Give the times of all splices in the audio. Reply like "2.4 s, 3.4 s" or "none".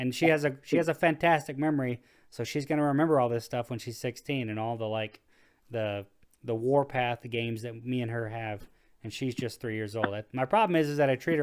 none